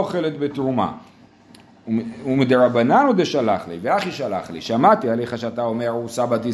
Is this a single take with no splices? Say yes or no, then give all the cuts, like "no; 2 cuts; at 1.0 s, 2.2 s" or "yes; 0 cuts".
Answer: yes; 0 cuts